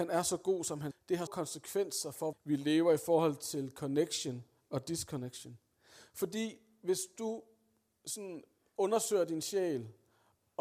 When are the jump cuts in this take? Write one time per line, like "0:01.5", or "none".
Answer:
0:00.9
0:01.3
0:02.3